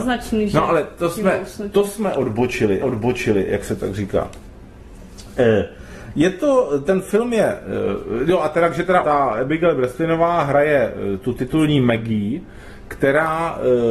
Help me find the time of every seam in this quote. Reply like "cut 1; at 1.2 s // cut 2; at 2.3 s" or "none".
cut 1; at 2.8 s // cut 2; at 9.0 s